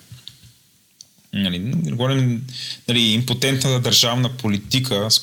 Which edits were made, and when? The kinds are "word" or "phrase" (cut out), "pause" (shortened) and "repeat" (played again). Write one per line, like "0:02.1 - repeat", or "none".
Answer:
none